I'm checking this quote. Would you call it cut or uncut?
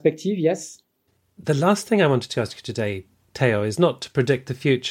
uncut